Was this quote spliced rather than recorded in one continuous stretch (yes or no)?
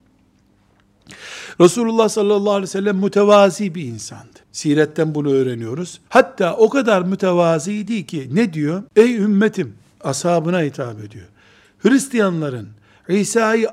yes